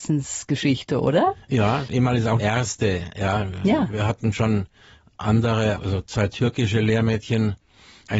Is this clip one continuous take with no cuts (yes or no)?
no